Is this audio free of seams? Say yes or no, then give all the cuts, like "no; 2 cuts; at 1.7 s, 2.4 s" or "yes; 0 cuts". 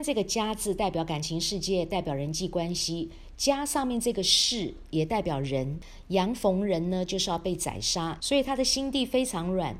no; 1 cut; at 8.2 s